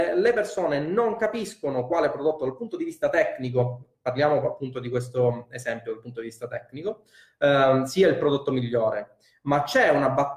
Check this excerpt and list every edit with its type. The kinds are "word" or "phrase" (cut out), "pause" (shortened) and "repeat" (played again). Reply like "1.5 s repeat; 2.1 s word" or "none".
none